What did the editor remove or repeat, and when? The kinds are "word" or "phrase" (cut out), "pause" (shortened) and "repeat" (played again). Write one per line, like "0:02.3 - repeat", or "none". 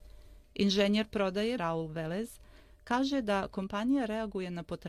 0:01.6 - word